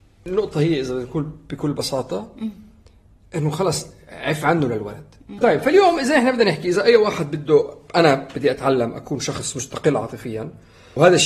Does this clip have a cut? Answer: no; 0 cuts

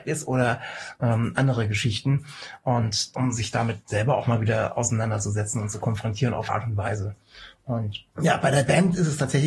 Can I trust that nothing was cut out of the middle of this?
no; 3 cuts; at 3.1 s, 6.5 s, 8.1 s

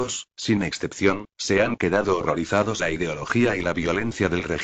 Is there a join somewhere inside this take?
yes; 1 cut; at 2.8 s

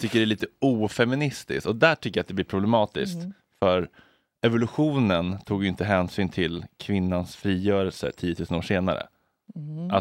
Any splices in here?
no; 0 cuts

